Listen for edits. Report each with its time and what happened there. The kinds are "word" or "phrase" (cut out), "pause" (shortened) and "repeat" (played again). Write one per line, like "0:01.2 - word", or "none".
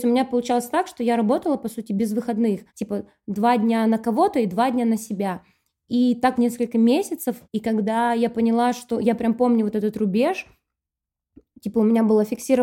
0:02.7 - pause
0:06.4 - word
0:07.4 - pause